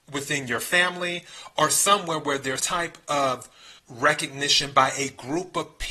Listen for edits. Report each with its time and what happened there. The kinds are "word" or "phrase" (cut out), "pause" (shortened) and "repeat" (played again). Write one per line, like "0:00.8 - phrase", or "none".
0:02.6 - word
0:03.8 - pause